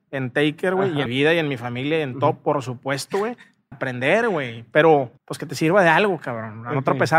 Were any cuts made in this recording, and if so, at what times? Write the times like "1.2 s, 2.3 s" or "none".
1.1 s, 3.7 s, 5.2 s